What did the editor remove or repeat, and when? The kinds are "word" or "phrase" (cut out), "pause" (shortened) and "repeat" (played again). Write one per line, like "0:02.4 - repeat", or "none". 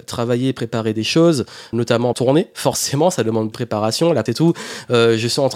0:01.7 - word
0:02.1 - phrase
0:03.5 - phrase
0:04.3 - word